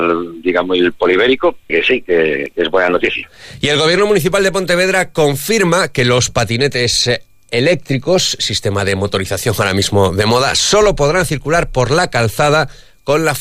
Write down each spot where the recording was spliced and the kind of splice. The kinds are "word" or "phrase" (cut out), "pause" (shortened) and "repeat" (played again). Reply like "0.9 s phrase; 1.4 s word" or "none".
1.7 s phrase